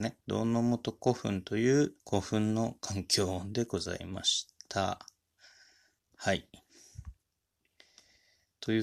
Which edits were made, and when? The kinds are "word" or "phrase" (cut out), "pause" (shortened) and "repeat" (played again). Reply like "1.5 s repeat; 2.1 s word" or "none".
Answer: 2.0 s pause